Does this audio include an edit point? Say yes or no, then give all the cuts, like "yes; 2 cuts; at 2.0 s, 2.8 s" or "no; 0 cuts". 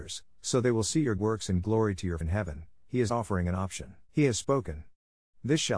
yes; 5 cuts; at 1.2 s, 1.6 s, 2.2 s, 3.1 s, 4.1 s